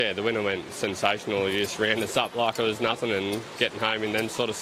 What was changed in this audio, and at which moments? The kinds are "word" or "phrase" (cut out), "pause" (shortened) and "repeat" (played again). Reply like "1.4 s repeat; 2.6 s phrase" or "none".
none